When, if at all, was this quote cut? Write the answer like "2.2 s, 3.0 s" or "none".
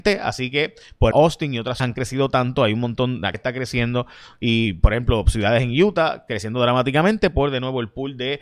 1.1 s, 1.8 s, 3.3 s